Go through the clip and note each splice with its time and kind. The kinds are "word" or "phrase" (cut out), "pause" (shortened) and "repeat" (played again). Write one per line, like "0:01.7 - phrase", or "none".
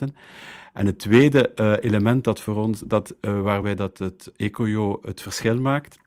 none

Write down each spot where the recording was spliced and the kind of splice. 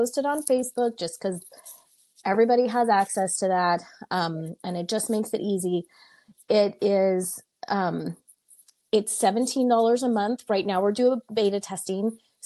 none

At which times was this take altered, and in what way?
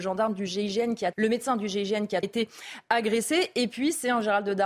0:01.1 - word
0:02.2 - phrase

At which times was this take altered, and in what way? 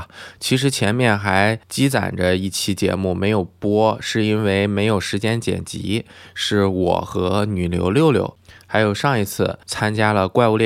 0:01.6 - pause
0:09.6 - pause

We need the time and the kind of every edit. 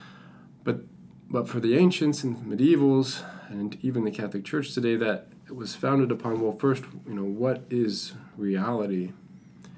none

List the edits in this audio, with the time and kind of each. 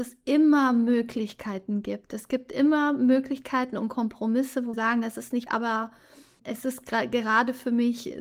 0:04.7 - word
0:05.5 - word
0:06.4 - word

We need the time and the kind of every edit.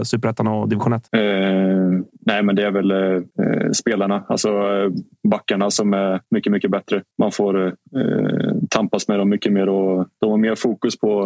0:01.1 - pause
0:03.3 - pause
0:07.1 - pause

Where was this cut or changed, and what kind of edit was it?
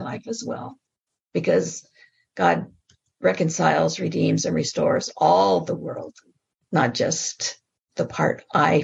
none

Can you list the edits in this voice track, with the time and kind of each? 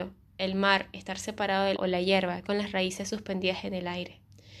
0:01.7 - word
0:02.4 - word

